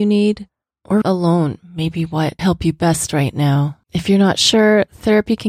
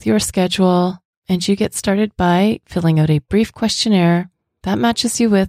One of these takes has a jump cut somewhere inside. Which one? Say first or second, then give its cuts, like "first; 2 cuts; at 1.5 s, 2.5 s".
first; 3 cuts; at 1.0 s, 2.4 s, 3.8 s